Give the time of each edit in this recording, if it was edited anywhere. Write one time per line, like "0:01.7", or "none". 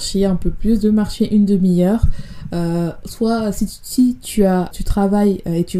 0:04.7